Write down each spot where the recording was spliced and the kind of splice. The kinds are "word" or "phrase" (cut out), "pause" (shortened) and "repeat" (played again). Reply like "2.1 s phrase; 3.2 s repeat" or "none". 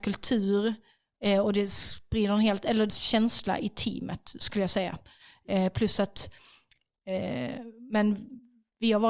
2.9 s phrase